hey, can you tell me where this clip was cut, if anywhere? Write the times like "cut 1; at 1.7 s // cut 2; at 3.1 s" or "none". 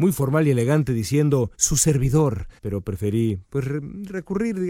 cut 1; at 1.5 s // cut 2; at 2.6 s